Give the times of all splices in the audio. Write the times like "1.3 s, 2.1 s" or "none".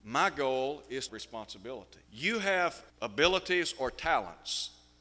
1.1 s, 2.0 s, 2.9 s